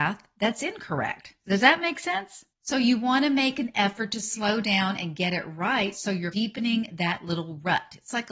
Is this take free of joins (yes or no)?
yes